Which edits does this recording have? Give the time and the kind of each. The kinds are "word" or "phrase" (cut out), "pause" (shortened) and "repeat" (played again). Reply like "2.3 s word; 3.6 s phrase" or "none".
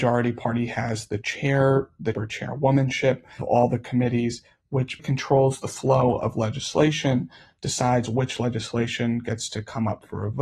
2.1 s word; 3.4 s word; 5.0 s word

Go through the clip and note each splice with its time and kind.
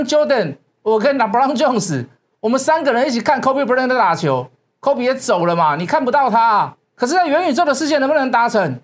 6.8 s pause

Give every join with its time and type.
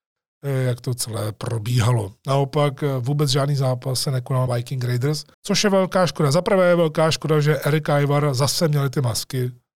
4.5 s phrase; 5.3 s pause

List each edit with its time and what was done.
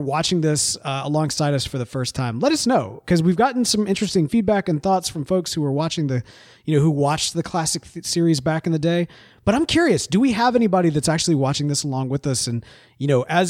none

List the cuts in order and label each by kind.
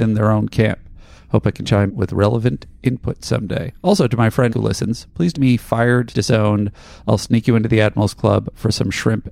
1.2 s pause; 1.9 s word; 4.5 s word; 5.3 s phrase; 6.1 s word

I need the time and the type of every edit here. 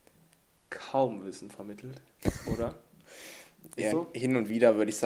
3.9 s phrase

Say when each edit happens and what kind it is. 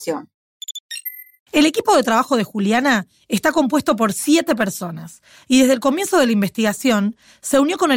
none

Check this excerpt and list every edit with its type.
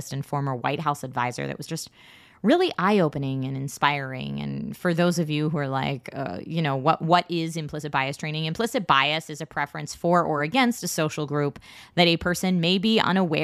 none

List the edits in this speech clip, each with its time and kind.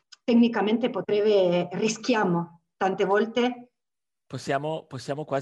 none

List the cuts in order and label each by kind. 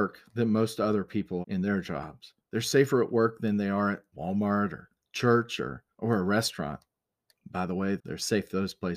1.4 s word; 2.4 s pause; 5.9 s pause; 8.0 s word

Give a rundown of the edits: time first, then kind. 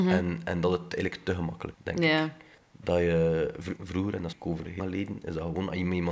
1.7 s word; 2.6 s pause; 3.8 s word; 4.3 s word; 4.8 s word

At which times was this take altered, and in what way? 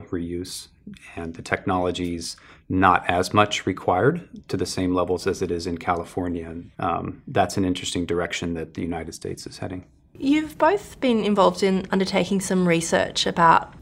6.7 s pause

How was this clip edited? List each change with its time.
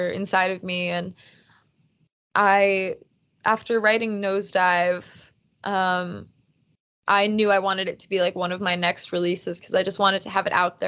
none

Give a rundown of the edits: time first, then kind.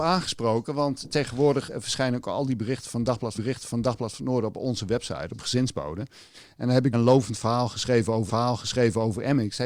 3.3 s repeat; 6.9 s word; 8.3 s repeat

